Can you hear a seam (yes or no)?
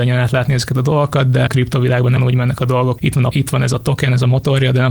yes